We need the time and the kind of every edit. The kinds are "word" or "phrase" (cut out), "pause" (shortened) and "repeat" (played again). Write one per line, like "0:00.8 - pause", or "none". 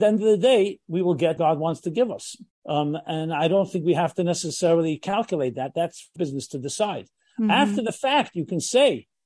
0:01.4 - word
0:02.5 - pause
0:06.2 - word